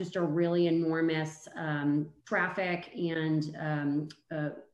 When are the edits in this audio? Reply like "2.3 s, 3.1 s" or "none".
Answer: 2.2 s